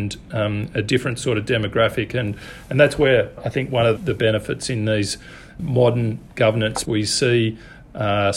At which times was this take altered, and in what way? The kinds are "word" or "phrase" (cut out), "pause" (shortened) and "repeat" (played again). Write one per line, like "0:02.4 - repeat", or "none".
0:03.4 - word
0:04.0 - word
0:05.6 - word
0:06.9 - word